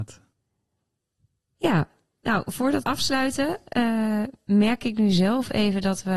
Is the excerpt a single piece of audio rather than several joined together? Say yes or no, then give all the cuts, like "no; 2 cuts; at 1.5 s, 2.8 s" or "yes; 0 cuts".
no; 1 cut; at 2.8 s